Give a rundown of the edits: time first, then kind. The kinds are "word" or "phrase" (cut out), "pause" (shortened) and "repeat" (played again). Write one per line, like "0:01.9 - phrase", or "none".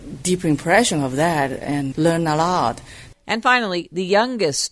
0:01.9 - word

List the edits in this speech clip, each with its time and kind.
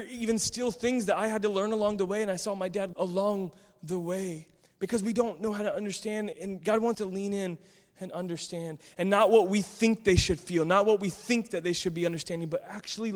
0:02.9 - word
0:06.3 - word
0:06.9 - word

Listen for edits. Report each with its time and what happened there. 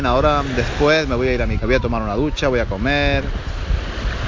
0:01.6 - word

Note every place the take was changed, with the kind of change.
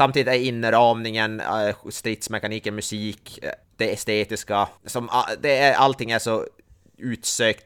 0:03.6 - pause
0:04.8 - pause

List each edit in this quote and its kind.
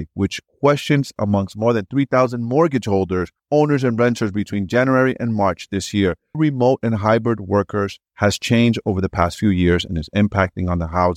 0:01.2 - word
0:03.4 - pause
0:06.3 - phrase
0:08.1 - pause

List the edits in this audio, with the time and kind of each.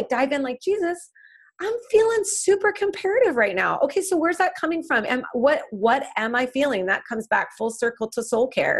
none

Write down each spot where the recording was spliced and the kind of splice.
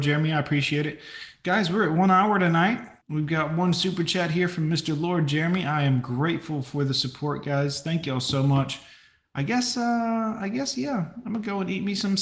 0:03.0 - pause

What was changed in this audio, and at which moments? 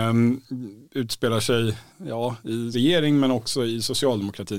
0:01.9 - pause
0:02.7 - word

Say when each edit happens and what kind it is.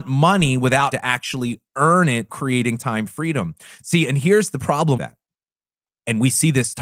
0:00.9 - word
0:02.3 - word
0:05.0 - word

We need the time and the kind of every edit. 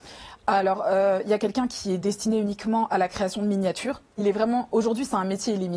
none

